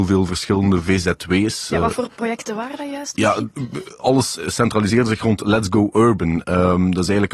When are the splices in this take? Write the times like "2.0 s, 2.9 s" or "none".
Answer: 4.3 s